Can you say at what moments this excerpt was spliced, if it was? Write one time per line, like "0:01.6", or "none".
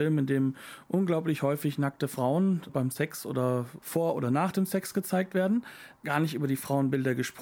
0:02.7
0:03.8
0:06.0